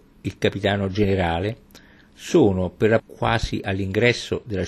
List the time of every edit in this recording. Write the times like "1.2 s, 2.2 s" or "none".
3.0 s